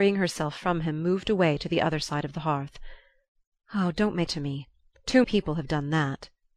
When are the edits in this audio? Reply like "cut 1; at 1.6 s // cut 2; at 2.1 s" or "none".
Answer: cut 1; at 4.3 s // cut 2; at 5.2 s